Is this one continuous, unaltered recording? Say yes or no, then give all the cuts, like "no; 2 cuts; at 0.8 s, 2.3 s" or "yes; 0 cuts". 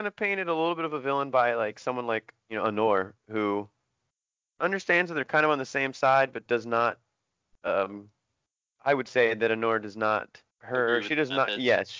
no; 3 cuts; at 2.4 s, 3.2 s, 10.5 s